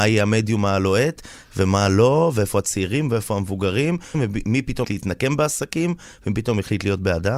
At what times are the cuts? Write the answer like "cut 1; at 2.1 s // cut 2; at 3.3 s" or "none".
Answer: cut 1; at 4.1 s // cut 2; at 4.8 s